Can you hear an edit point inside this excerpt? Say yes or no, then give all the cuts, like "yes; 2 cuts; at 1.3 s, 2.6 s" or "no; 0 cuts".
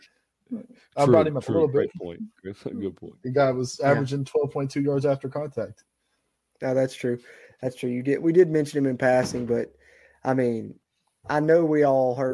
no; 0 cuts